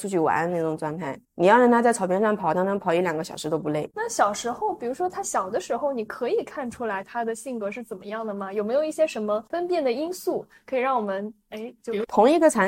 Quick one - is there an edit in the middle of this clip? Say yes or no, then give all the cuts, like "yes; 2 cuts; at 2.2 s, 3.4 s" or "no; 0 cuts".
yes; 1 cut; at 1.2 s